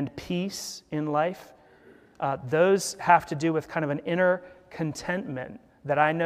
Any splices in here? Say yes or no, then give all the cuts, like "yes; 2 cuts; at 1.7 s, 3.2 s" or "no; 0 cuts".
no; 0 cuts